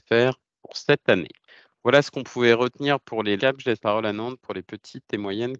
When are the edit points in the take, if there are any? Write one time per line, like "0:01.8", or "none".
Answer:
0:01.4
0:03.4
0:03.8

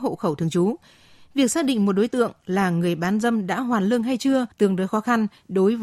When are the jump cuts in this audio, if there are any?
0:04.5

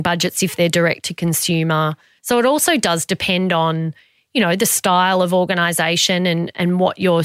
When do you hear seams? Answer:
none

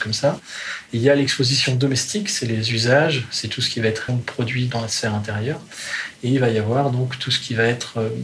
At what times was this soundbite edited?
0:04.1

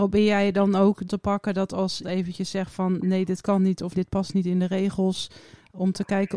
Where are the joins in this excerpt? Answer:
0:01.0
0:02.0
0:03.9

